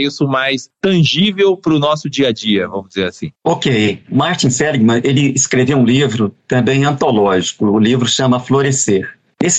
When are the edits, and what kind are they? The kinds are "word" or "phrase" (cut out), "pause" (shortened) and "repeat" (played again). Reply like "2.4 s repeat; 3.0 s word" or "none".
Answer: 3.4 s pause